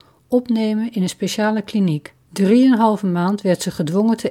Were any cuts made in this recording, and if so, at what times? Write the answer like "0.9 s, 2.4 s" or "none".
2.2 s